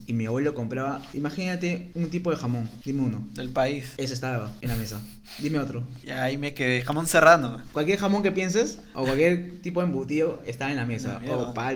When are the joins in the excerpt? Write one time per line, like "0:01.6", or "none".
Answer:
none